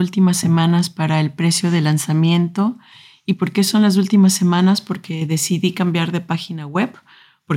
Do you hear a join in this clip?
no; 0 cuts

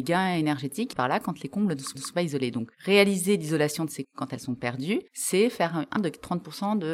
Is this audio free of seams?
no; 5 cuts; at 0.9 s, 1.9 s, 4.0 s, 5.1 s, 6.0 s

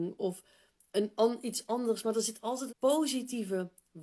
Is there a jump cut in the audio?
yes; 1 cut; at 2.7 s

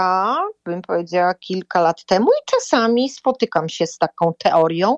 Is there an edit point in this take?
no; 0 cuts

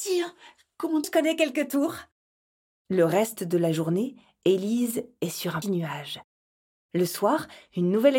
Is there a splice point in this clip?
yes; 2 cuts; at 1.0 s, 5.6 s

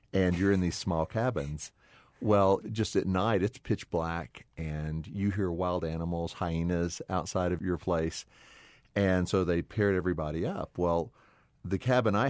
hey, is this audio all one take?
yes; 0 cuts

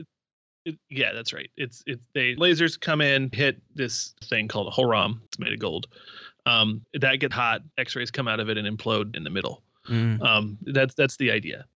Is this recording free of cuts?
no; 9 cuts; at 2.4 s, 3.3 s, 4.2 s, 5.3 s, 6.8 s, 7.3 s, 7.7 s, 9.1 s, 10.7 s

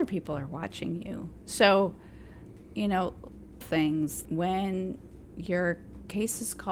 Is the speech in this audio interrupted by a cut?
yes; 2 cuts; at 3.6 s, 4.2 s

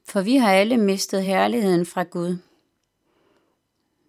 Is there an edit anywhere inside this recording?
no; 0 cuts

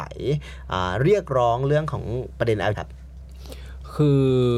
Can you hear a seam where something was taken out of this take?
yes; 1 cut; at 2.7 s

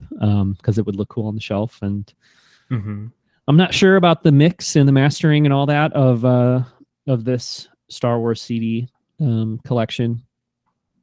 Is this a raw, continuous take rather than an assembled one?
yes; 0 cuts

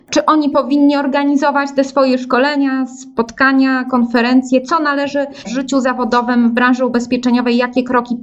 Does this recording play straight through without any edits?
no; 1 cut; at 5.4 s

